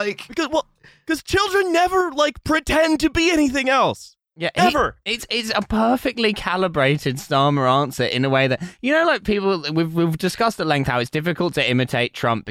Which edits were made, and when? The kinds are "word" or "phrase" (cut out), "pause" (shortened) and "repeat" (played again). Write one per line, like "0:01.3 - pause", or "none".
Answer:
none